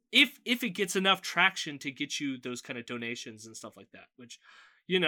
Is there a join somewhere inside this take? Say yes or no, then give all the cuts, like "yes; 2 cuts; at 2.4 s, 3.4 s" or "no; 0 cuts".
no; 0 cuts